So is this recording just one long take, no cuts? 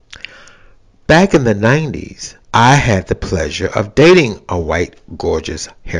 no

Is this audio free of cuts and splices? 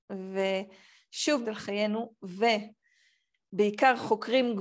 no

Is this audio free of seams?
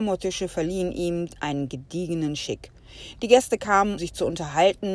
no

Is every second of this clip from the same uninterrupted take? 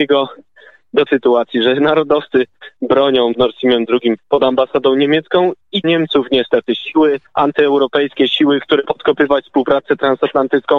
no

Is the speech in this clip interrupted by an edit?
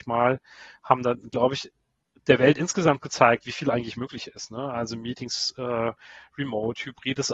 no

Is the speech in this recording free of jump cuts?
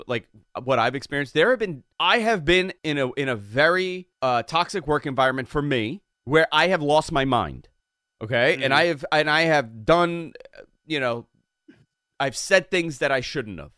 no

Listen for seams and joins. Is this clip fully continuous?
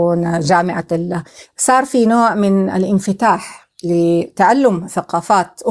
yes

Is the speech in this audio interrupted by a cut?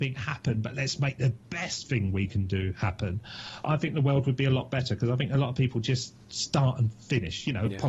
yes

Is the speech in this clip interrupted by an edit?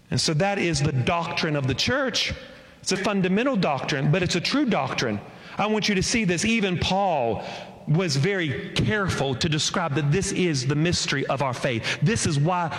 yes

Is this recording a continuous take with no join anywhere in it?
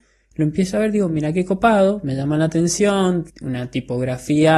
no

